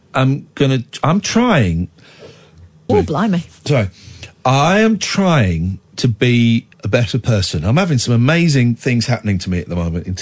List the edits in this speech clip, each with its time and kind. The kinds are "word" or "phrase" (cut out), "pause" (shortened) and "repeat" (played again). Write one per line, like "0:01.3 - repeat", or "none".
0:02.9 - word
0:06.7 - pause